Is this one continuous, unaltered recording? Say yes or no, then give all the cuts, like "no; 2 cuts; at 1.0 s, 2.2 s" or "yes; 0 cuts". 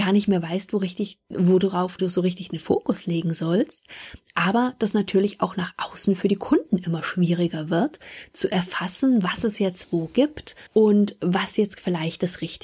no; 2 cuts; at 2.0 s, 10.7 s